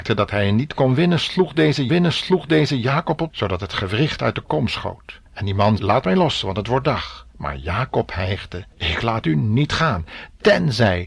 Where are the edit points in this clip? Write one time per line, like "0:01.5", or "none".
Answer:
0:01.9
0:03.3
0:05.3
0:05.8
0:07.3
0:08.7